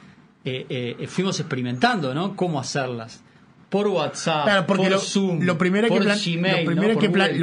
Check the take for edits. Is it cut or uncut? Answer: uncut